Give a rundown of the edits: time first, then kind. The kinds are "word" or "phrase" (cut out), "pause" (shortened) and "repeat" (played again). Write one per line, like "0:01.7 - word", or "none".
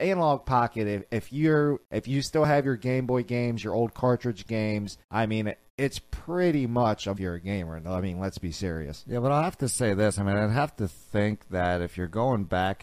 0:01.8 - pause
0:05.0 - pause
0:05.7 - pause
0:07.1 - phrase